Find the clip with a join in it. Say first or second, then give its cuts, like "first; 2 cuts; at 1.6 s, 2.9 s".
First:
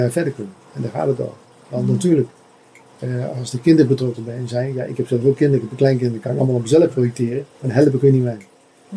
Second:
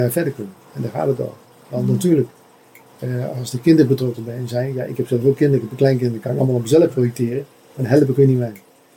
first; 1 cut; at 7.5 s